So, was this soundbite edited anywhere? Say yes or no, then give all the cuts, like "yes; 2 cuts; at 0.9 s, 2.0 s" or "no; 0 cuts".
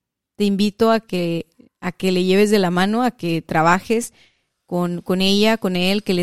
no; 0 cuts